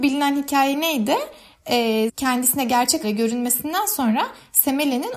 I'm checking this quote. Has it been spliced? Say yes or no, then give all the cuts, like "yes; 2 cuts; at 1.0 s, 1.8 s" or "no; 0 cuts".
yes; 2 cuts; at 2.1 s, 3.0 s